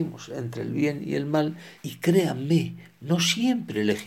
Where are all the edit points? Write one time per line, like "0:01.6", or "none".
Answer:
0:01.8